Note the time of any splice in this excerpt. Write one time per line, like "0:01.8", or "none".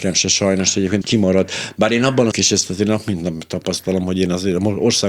0:01.0
0:02.3